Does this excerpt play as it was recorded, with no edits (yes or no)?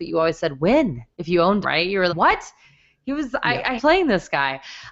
no